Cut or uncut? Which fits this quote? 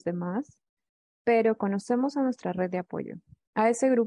uncut